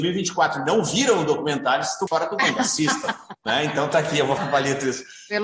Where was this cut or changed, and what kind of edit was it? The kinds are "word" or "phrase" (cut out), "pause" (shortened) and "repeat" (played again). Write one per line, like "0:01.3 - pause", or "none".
0:02.1 - word
0:04.4 - word